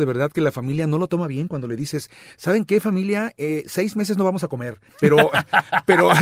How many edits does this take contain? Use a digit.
1